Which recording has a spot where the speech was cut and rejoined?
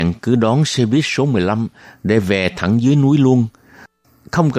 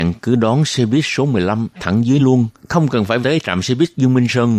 second; 4 cuts; at 1.8 s, 2.2 s, 2.6 s, 3.2 s

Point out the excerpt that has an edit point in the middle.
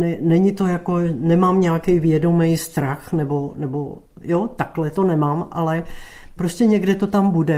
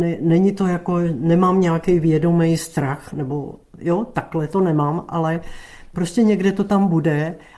second; 1 cut; at 3.1 s

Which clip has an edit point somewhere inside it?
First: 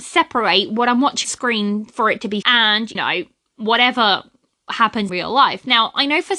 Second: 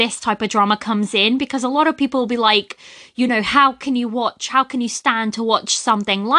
first; 4 cuts; at 1.2 s, 2.4 s, 3.0 s, 5.1 s

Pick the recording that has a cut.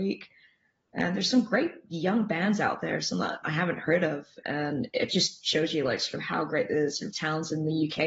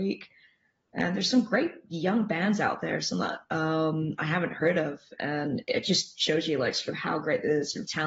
first; 1 cut; at 3.4 s

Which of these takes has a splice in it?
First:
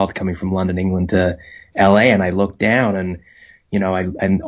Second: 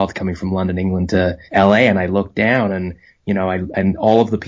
second; 2 cuts; at 1.5 s, 3.1 s

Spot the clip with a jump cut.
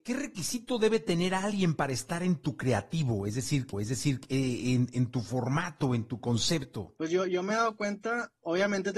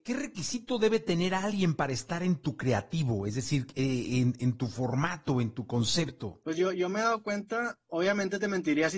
first; 1 cut; at 3.7 s

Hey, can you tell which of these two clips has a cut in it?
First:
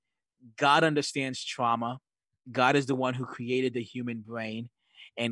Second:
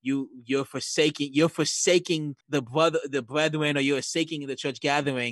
second; 1 cut; at 2.4 s

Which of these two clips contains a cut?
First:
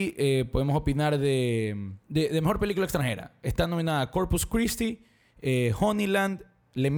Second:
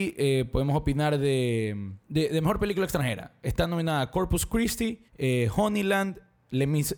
second; 1 cut; at 5.1 s

